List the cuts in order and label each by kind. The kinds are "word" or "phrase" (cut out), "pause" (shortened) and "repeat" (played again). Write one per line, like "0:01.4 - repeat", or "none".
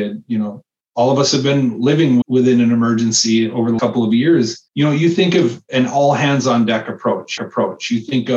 0:02.2 - word
0:03.8 - word
0:04.7 - pause
0:07.4 - repeat